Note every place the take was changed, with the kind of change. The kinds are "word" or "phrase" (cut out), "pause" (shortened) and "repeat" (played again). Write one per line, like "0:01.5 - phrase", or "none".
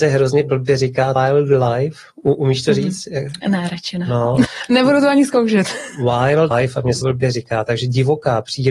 0:01.2 - word
0:04.4 - word
0:06.5 - phrase
0:07.0 - word